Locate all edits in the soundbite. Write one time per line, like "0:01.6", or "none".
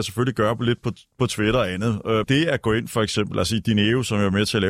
0:02.2